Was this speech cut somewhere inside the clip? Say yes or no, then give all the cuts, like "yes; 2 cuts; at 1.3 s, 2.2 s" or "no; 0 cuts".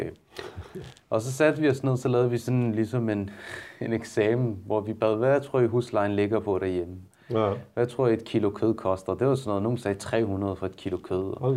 yes; 2 cuts; at 1.0 s, 3.8 s